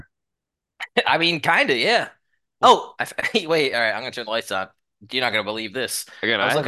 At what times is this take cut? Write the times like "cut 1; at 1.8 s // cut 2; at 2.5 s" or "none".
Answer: none